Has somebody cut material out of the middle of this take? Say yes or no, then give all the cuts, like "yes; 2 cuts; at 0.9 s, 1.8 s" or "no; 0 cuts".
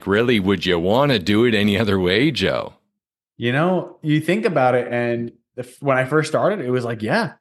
no; 0 cuts